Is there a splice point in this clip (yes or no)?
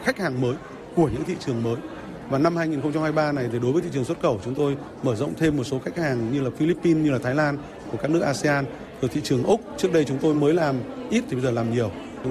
no